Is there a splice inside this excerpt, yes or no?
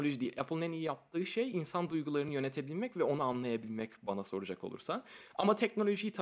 no